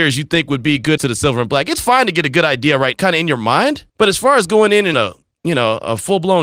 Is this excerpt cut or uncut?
cut